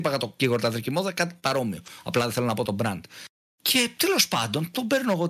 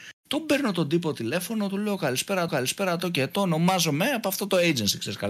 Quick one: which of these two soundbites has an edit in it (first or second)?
second